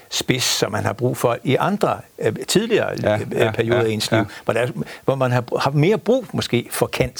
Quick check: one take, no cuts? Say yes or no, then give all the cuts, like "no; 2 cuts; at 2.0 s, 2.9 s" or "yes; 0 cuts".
yes; 0 cuts